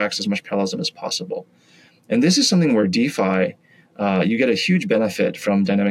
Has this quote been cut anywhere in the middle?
no; 0 cuts

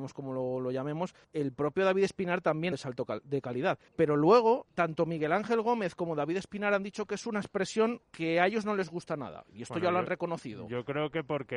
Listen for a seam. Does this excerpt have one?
yes; 5 cuts; at 1.2 s, 2.7 s, 3.9 s, 4.7 s, 8.0 s

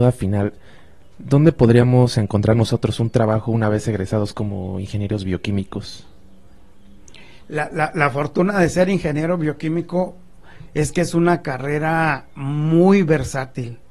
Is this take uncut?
yes; 0 cuts

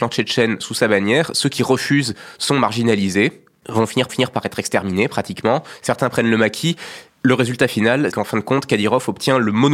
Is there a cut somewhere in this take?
yes; 3 cuts; at 2.3 s, 4.1 s, 8.1 s

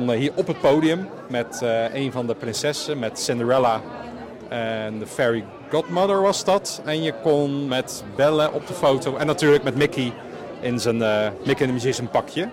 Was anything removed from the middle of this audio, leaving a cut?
no; 0 cuts

